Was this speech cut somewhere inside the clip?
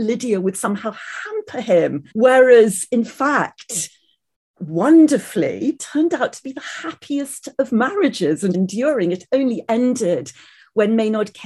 yes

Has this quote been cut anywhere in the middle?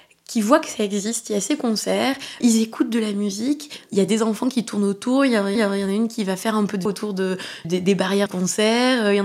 yes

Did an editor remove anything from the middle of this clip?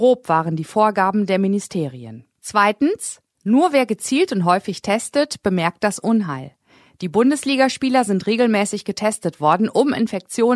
no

